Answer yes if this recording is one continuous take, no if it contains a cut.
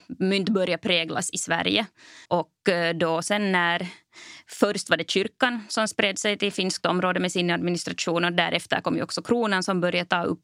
no